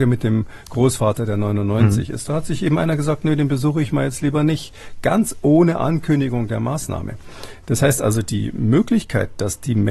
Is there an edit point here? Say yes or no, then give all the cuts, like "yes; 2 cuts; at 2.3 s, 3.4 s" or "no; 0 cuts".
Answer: no; 0 cuts